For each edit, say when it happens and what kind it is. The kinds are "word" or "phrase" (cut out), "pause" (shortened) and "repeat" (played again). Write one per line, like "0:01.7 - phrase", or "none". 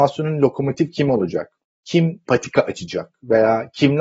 0:02.3 - word